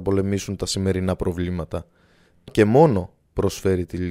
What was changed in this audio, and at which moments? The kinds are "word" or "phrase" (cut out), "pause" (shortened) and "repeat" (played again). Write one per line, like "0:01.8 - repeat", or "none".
0:02.5 - word